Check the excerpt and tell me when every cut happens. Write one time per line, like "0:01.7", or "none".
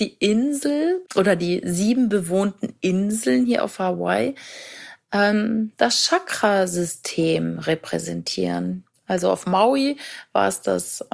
0:01.1